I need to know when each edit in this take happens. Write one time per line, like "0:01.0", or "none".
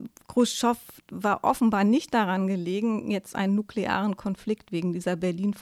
none

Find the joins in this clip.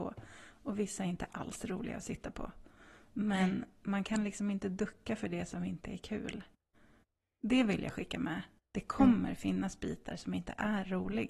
none

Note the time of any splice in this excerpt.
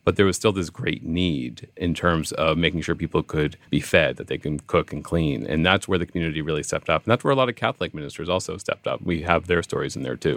0:03.6

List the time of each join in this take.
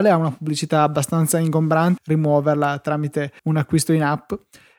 0:02.0
0:03.4

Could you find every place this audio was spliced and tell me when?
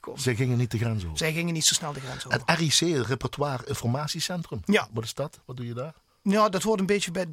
none

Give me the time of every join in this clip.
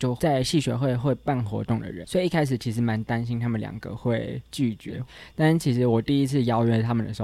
0:02.0

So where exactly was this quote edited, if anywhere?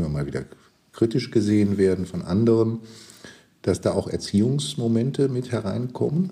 none

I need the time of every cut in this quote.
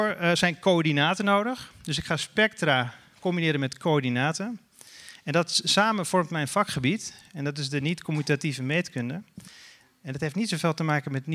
none

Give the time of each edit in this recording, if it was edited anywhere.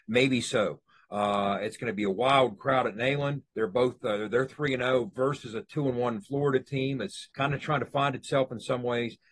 0:03.5
0:07.3

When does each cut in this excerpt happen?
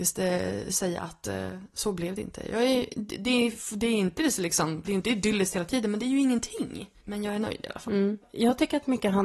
0:04.8

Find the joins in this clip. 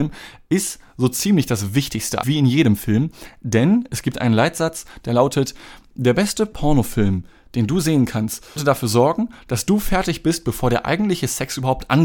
0:02.2
0:08.6

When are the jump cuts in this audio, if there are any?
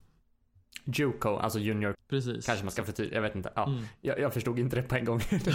0:01.9

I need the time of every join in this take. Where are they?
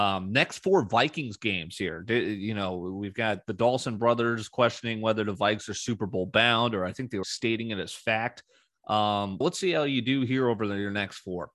0:07.2
0:09.4

